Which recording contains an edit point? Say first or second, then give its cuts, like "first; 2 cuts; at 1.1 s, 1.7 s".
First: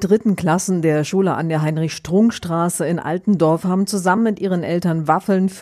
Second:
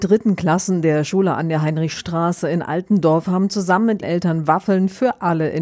second; 2 cuts; at 2.0 s, 4.0 s